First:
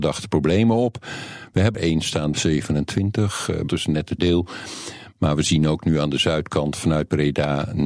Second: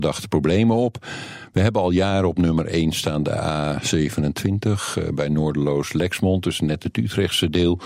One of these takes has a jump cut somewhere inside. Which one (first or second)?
first